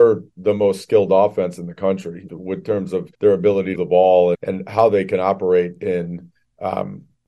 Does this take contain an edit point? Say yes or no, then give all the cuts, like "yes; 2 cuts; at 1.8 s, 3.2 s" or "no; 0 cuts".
yes; 4 cuts; at 2.3 s, 3.1 s, 3.8 s, 4.3 s